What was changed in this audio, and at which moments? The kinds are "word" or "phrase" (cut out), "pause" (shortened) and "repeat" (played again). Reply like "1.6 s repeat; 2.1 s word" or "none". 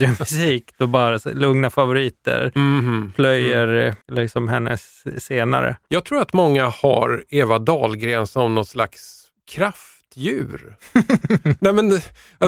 4.0 s pause; 9.4 s pause